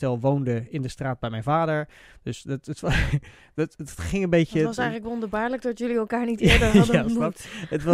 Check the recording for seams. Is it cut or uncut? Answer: uncut